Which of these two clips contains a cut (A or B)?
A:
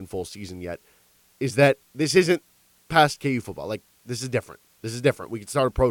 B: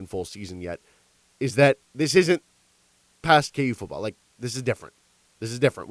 A